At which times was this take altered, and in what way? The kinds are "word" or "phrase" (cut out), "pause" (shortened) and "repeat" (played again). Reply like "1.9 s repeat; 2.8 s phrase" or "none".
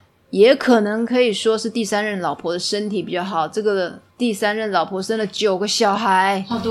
4.1 s pause